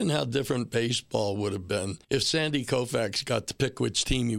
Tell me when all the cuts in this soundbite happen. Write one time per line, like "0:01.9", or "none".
0:02.0